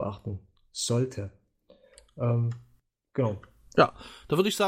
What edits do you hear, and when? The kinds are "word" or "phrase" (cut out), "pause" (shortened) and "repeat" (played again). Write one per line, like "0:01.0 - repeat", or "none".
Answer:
none